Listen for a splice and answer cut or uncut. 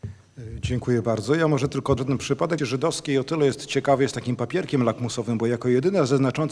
cut